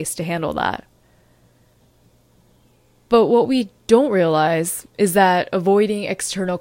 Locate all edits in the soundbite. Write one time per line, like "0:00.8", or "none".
0:04.9